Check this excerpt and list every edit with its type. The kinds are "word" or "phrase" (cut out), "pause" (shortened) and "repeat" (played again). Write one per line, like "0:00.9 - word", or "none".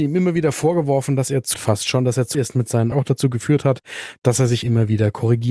0:01.5 - phrase
0:02.3 - word
0:02.9 - phrase